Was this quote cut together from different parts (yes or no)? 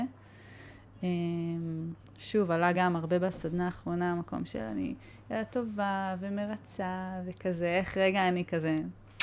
no